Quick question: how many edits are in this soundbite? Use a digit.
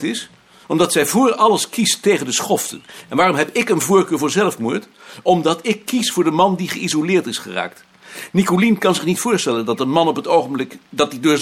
0